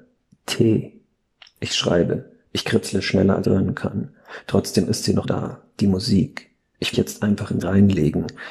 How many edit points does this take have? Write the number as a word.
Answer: four